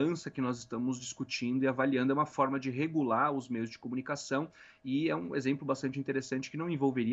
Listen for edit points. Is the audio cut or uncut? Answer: uncut